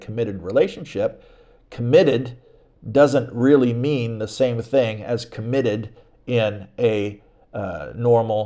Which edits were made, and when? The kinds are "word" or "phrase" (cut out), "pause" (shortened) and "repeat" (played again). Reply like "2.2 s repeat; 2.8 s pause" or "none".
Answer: none

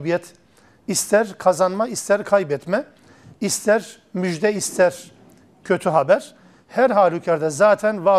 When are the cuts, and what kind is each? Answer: none

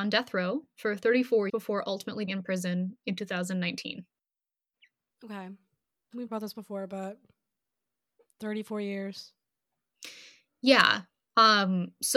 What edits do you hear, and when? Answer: 1.5 s word; 2.3 s word; 6.3 s word

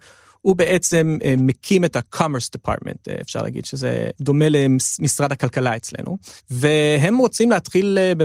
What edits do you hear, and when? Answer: 6.4 s pause

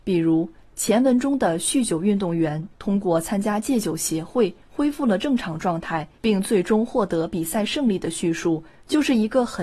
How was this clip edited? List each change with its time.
6.2 s pause

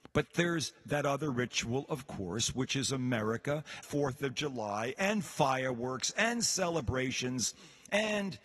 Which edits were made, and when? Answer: 3.8 s word

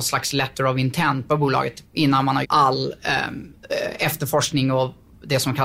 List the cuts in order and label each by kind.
1.3 s phrase; 2.4 s word

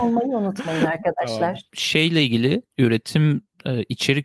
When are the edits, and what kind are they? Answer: 1.7 s pause

